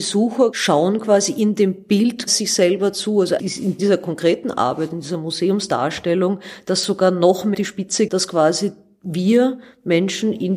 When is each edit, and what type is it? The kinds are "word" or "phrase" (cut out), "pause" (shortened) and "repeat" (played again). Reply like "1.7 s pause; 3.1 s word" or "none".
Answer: 3.4 s word; 7.5 s word; 8.1 s word